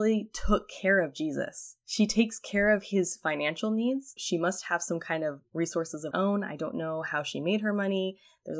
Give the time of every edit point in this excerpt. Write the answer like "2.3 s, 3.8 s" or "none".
1.8 s, 4.2 s, 6.1 s